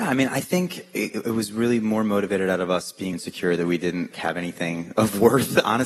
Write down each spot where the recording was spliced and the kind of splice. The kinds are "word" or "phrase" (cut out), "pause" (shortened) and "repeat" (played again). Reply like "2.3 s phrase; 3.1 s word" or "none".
3.1 s word; 4.1 s word; 5.0 s word